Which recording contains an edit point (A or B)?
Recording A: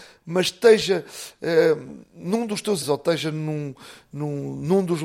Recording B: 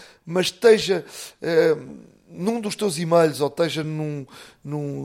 A